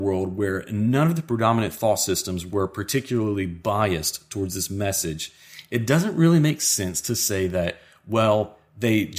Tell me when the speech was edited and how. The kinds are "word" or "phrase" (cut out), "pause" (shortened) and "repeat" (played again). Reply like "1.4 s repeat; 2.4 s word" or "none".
none

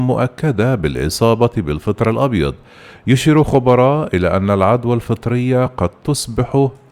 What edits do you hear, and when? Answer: none

